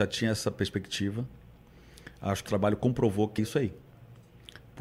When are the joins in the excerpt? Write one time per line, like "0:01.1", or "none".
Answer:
0:02.5
0:03.4